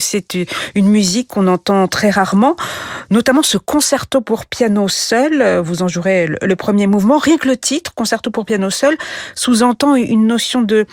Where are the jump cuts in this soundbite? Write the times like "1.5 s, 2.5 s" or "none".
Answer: none